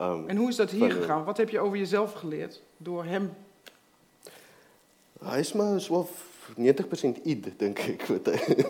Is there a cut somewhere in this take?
no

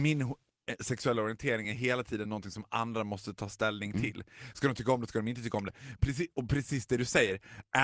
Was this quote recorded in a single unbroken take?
yes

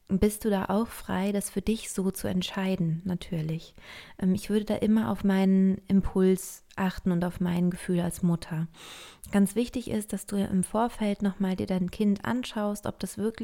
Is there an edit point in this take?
no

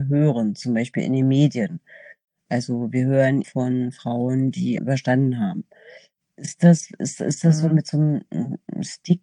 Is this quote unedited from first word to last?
no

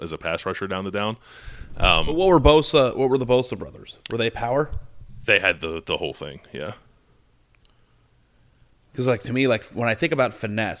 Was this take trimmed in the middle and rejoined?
no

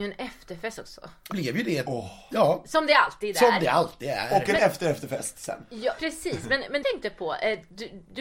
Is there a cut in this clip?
yes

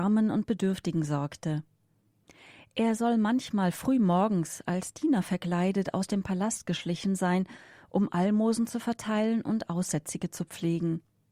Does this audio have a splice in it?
no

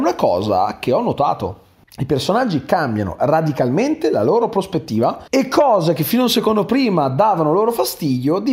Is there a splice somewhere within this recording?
yes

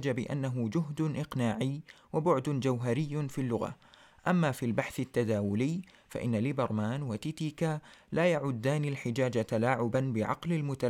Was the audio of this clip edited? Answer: no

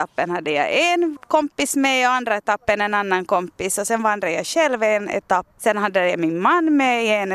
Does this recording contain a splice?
no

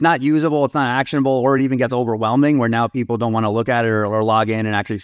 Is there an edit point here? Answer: no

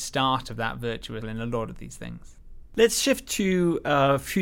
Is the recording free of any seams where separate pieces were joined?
no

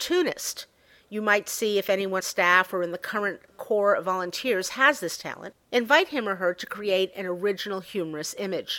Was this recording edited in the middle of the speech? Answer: yes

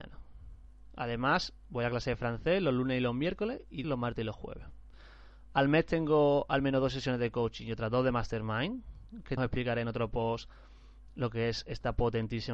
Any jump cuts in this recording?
yes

